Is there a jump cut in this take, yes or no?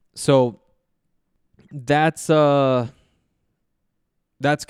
no